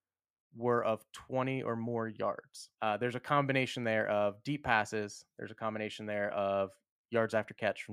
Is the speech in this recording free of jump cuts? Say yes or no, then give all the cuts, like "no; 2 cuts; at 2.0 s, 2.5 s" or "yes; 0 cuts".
no; 1 cut; at 2.7 s